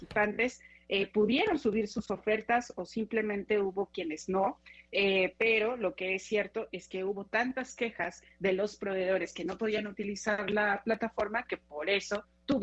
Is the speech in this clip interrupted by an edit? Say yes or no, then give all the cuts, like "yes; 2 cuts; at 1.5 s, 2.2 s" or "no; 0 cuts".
no; 0 cuts